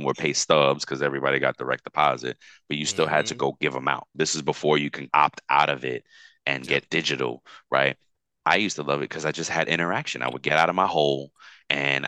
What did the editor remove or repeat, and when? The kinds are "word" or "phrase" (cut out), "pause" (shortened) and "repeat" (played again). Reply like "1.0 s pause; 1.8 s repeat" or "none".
none